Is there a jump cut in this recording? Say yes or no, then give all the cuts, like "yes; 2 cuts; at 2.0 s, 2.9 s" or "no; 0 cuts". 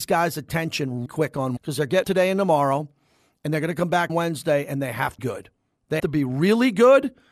yes; 6 cuts; at 1.1 s, 1.6 s, 2.0 s, 4.1 s, 5.2 s, 6.0 s